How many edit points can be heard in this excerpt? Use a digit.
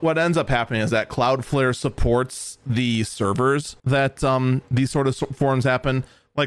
1